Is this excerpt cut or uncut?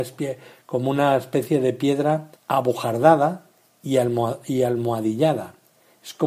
cut